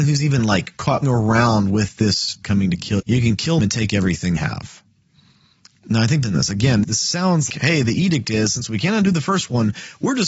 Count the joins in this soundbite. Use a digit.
8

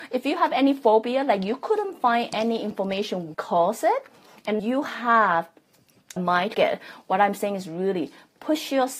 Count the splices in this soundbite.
4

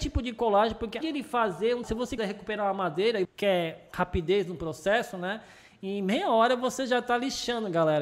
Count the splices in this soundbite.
4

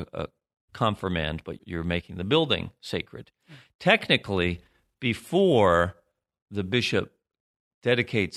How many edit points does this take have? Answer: 1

